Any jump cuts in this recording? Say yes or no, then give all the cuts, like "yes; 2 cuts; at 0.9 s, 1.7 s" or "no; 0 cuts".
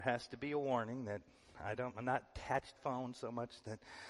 yes; 1 cut; at 2.8 s